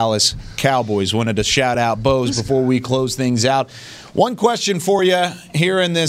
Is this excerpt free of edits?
yes; 0 cuts

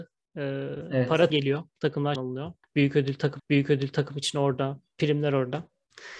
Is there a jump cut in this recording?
yes; 3 cuts; at 1.3 s, 2.2 s, 3.4 s

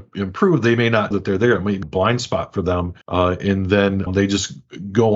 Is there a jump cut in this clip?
yes; 4 cuts; at 1.1 s, 1.8 s, 3.0 s, 4.1 s

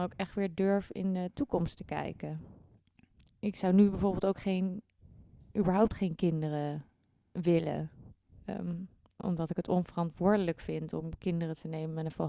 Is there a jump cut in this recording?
no; 0 cuts

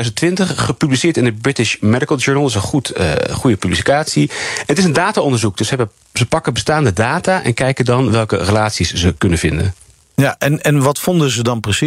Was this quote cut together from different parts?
no; 0 cuts

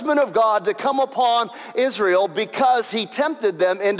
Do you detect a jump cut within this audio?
no; 0 cuts

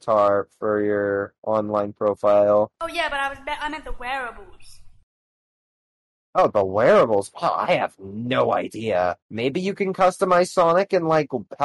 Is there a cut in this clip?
yes; 1 cut; at 9.2 s

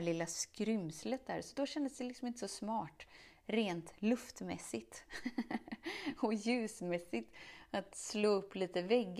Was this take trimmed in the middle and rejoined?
no; 0 cuts

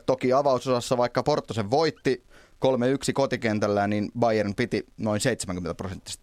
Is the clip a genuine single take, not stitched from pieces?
yes; 0 cuts

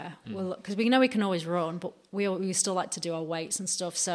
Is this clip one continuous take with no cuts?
yes; 0 cuts

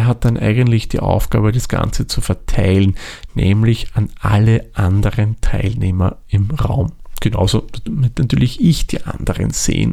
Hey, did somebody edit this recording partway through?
no; 0 cuts

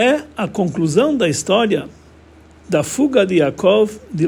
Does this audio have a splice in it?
no; 0 cuts

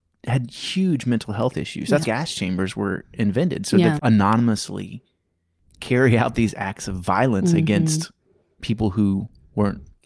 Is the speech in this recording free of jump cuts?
no; 2 cuts; at 2.0 s, 4.0 s

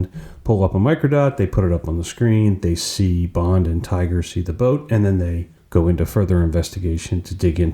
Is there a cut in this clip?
no; 0 cuts

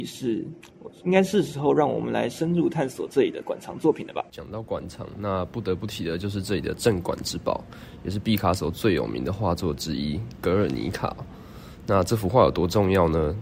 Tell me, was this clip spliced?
yes; 1 cut; at 4.3 s

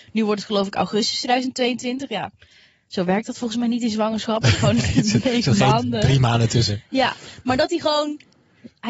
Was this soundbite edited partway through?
no; 0 cuts

